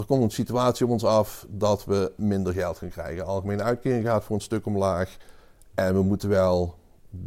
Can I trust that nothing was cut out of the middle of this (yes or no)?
yes